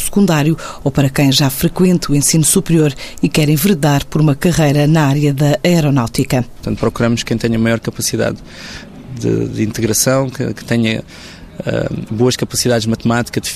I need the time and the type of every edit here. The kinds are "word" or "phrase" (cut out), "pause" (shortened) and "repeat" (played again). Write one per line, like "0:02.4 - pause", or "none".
none